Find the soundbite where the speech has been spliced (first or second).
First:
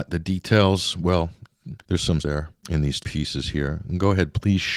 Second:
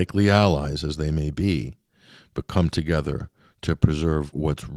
first